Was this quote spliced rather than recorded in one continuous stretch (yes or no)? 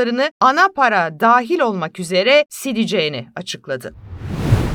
no